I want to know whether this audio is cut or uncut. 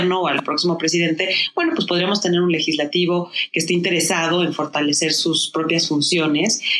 uncut